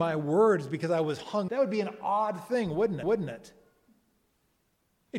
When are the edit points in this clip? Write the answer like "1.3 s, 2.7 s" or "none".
1.5 s, 3.0 s